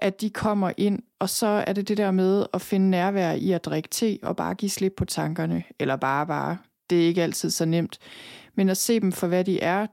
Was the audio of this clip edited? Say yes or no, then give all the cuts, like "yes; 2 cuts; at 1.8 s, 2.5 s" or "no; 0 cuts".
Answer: no; 0 cuts